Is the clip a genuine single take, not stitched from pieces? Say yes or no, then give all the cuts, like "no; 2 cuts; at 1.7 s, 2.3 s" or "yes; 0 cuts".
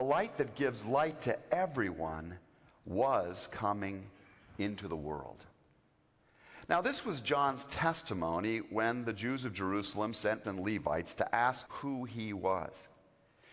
no; 2 cuts; at 10.4 s, 11.7 s